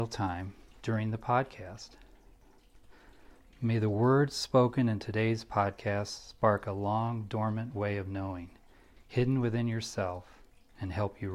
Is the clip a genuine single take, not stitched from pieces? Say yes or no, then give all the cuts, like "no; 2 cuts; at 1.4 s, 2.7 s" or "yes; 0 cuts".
yes; 0 cuts